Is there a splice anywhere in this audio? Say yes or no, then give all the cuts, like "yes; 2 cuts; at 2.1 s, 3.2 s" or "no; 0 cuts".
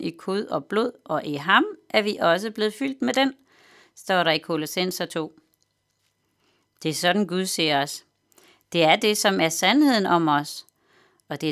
no; 0 cuts